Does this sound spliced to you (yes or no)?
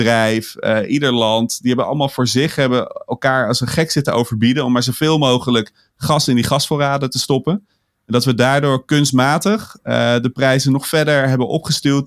no